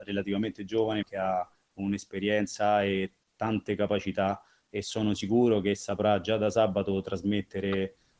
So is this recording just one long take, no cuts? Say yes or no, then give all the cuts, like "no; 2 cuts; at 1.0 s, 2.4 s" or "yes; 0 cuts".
no; 1 cut; at 1.0 s